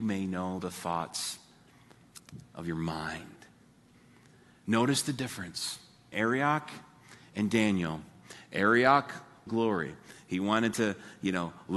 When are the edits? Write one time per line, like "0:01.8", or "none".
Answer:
0:06.1
0:09.5

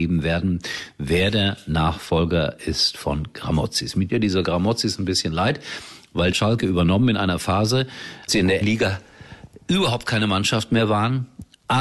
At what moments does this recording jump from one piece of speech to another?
0:04.1
0:06.3
0:08.3
0:08.6

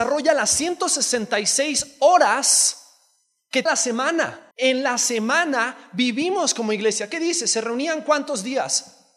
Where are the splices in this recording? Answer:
0:03.7
0:04.5

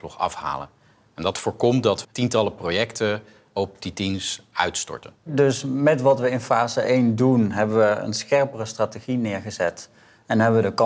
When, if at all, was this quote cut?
0:02.0
0:05.2

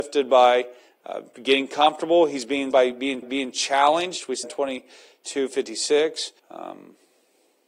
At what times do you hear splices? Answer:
0:02.7
0:03.2
0:04.4
0:06.4

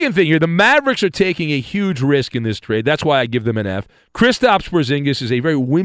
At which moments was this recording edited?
none

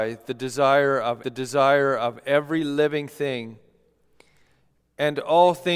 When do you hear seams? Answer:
0:01.2

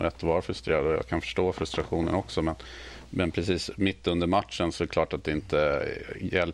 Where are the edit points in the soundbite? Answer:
none

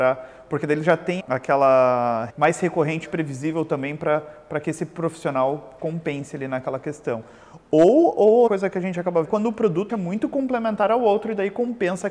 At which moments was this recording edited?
0:01.2
0:02.3
0:03.1
0:05.8
0:08.5
0:09.2
0:09.9

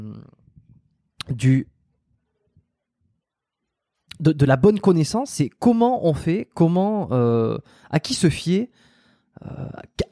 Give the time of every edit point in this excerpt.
none

